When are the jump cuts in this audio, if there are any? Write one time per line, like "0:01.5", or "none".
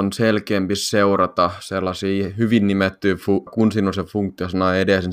0:03.5

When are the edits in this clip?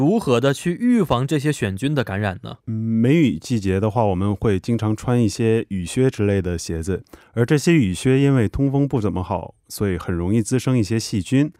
0:02.6

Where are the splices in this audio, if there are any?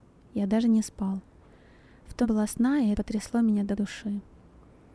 0:02.2
0:02.9
0:03.8

